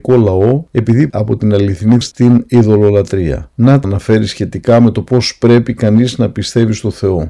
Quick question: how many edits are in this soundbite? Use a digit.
3